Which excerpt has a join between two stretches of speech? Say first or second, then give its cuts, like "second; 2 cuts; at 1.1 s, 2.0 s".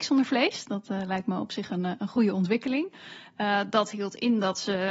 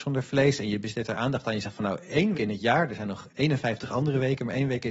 second; 2 cuts; at 2.3 s, 3.3 s